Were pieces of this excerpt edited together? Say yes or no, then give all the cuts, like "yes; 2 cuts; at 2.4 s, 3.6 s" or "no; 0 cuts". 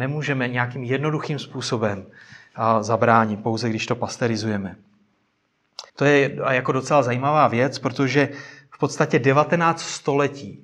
yes; 1 cut; at 5.9 s